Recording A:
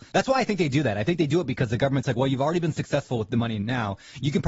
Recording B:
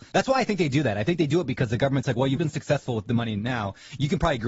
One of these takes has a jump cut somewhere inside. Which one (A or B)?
B